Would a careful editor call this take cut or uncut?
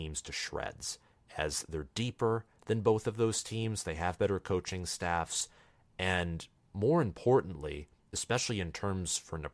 uncut